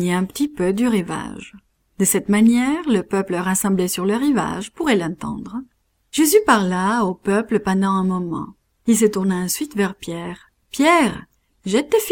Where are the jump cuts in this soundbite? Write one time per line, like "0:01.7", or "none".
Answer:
none